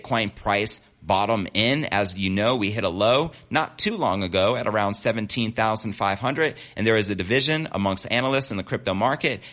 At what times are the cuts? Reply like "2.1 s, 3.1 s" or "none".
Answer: none